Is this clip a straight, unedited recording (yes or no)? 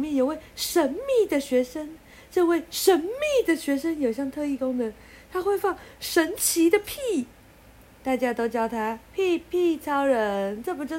no